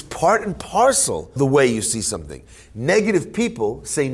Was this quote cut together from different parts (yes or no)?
yes